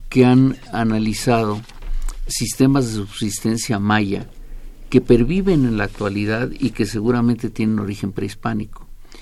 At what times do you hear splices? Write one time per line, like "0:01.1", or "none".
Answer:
0:02.3